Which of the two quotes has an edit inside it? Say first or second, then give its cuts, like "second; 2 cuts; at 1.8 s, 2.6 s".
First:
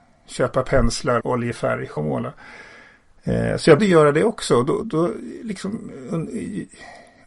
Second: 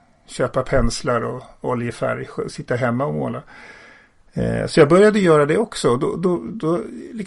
first; 4 cuts; at 1.2 s, 2.0 s, 3.8 s, 4.8 s